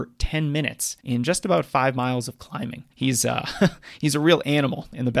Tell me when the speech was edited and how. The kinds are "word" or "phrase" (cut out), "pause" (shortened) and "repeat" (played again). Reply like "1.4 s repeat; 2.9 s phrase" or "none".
1.0 s pause; 2.9 s pause